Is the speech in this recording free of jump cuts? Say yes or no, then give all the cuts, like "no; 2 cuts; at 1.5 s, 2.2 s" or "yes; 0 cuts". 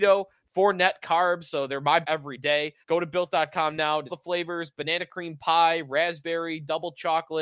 no; 3 cuts; at 2.0 s, 2.8 s, 4.1 s